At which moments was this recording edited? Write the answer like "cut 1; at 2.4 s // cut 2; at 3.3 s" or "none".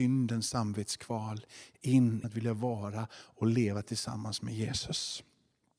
cut 1; at 2.2 s